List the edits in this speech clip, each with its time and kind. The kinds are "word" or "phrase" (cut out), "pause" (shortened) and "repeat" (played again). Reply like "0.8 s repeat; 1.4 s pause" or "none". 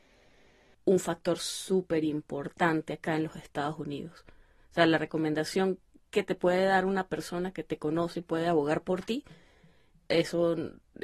none

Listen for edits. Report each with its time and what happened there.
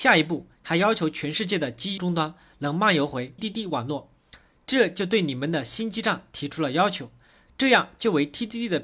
2.0 s word; 3.4 s word

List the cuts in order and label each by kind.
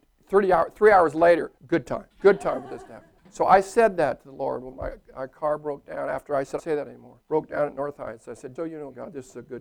1.6 s pause; 2.1 s pause; 3.2 s pause; 6.6 s phrase; 7.2 s pause; 8.6 s word

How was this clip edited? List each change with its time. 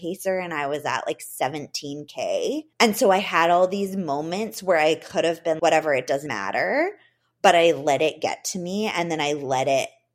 2.7 s pause; 5.6 s word; 6.3 s word

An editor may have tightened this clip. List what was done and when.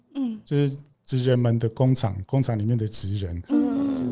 0.9 s pause

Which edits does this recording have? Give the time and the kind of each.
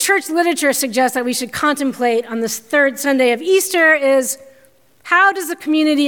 none

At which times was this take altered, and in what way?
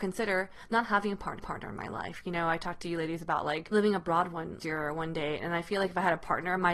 1.4 s repeat; 3.7 s word; 4.6 s phrase

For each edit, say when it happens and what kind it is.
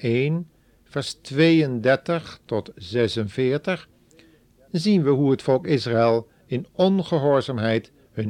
none

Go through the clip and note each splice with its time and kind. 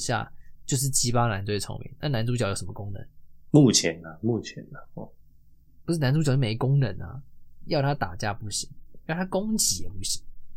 none

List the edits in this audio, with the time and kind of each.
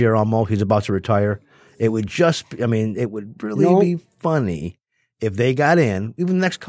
none

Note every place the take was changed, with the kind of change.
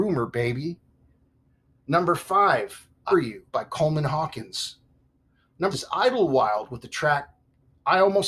3.1 s word; 3.5 s pause; 5.7 s word

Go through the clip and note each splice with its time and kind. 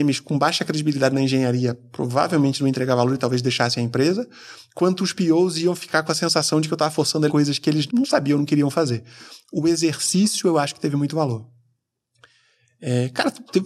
7.3 s phrase; 7.9 s word

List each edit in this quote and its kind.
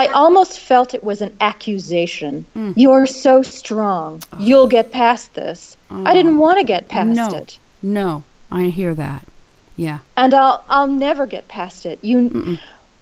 none

